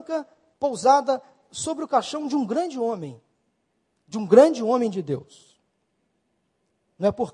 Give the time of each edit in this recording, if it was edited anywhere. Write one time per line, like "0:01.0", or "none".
none

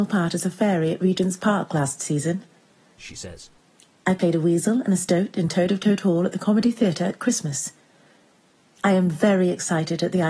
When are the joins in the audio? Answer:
none

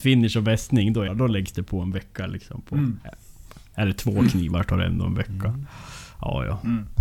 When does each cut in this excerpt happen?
0:01.1

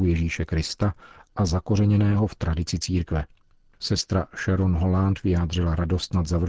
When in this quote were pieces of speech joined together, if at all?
none

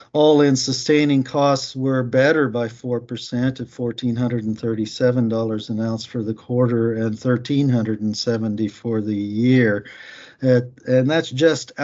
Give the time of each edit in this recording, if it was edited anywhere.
none

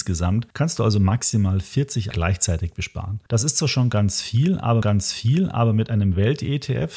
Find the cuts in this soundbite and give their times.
0:02.1
0:04.8

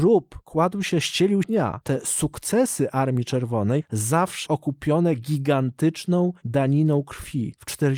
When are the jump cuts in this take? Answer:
0:01.4
0:04.5

